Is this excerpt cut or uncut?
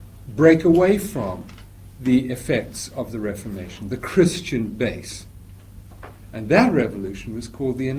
uncut